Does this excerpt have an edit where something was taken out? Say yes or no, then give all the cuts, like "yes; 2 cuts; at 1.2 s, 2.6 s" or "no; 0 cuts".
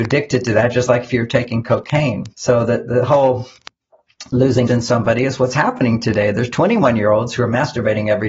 yes; 2 cuts; at 2.3 s, 4.7 s